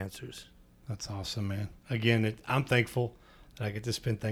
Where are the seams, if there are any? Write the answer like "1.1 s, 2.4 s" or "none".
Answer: 1.8 s

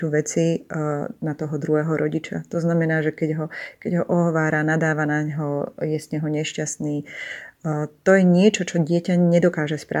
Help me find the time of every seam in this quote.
none

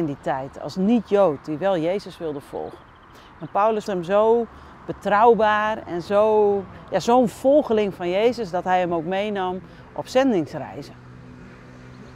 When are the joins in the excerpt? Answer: 3.9 s

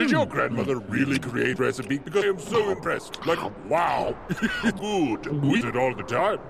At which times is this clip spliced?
1.6 s, 2.2 s, 4.8 s, 5.6 s

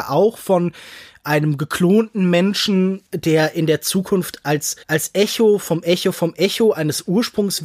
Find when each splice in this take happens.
3.1 s, 4.8 s

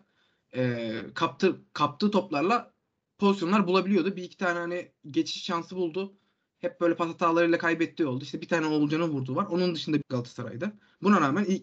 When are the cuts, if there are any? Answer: 10.0 s

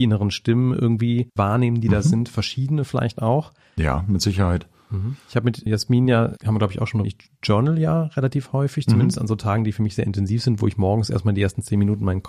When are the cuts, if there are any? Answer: 1.4 s, 5.7 s, 6.4 s, 7.0 s

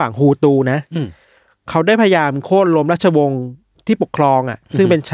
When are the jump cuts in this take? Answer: none

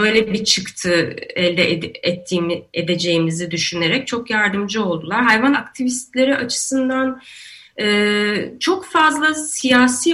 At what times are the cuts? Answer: 5.5 s

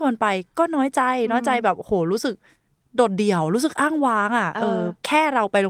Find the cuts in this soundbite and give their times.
none

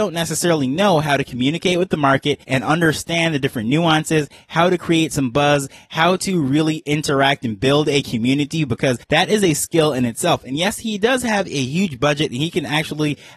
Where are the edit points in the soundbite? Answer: 2.4 s, 9.0 s

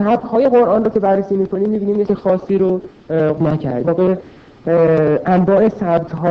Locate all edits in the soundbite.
2.1 s, 3.4 s, 3.8 s

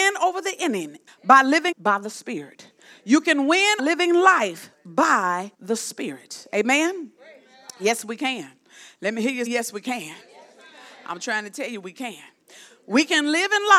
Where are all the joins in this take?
1.1 s, 1.7 s, 3.8 s, 5.5 s, 9.5 s

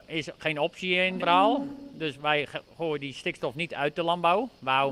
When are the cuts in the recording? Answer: 1.2 s

